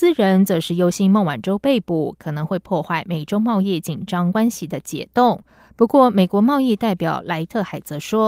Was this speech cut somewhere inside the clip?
no; 0 cuts

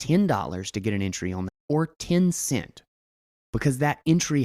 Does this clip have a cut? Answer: yes; 1 cut; at 1.5 s

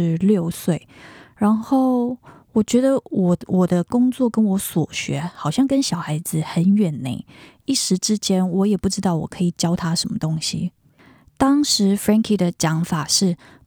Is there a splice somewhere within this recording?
no; 0 cuts

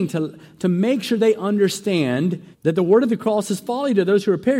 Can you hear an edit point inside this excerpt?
yes; 1 cut; at 2.5 s

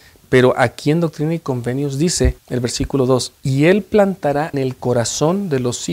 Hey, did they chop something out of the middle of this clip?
yes; 3 cuts; at 2.4 s, 3.4 s, 4.5 s

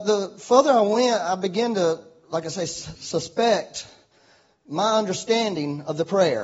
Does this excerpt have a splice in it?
no; 0 cuts

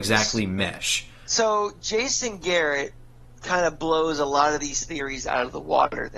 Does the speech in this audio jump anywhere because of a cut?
no; 0 cuts

